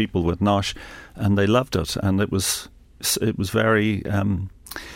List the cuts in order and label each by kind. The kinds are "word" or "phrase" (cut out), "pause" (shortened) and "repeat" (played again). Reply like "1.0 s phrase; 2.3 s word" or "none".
none